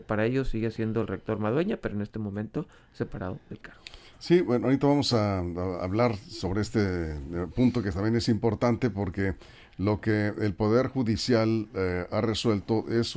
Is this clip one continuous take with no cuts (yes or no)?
yes